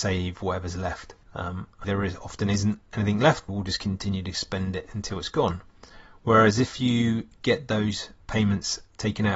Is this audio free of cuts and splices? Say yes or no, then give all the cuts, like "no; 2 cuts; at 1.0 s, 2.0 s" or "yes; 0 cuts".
no; 3 cuts; at 1.2 s, 1.8 s, 3.5 s